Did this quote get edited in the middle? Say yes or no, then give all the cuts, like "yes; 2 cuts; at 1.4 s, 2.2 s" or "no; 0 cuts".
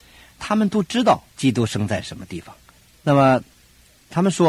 yes; 2 cuts; at 1.3 s, 2.8 s